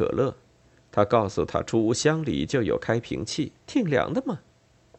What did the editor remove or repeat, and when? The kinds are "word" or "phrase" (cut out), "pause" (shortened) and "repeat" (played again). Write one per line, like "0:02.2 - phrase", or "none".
0:03.6 - pause